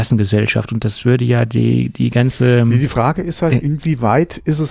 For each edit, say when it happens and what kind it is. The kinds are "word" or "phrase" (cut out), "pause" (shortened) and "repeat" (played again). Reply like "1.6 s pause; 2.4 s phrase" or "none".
none